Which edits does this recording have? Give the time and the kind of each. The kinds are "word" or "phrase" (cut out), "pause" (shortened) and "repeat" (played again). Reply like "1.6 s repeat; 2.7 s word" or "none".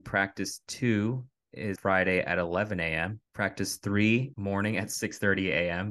1.8 s word; 3.3 s pause; 4.3 s phrase